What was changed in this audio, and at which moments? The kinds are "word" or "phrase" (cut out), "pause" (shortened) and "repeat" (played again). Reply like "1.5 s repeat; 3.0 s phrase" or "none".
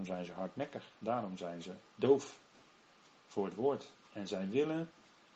1.9 s pause